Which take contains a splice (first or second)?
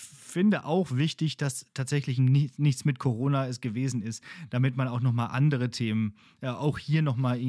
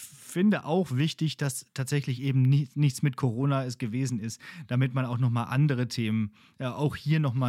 first